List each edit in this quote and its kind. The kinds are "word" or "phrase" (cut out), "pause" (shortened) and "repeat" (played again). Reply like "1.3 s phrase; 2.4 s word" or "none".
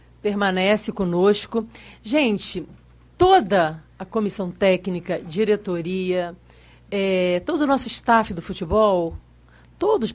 none